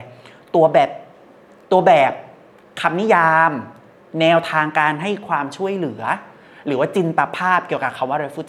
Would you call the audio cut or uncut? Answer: uncut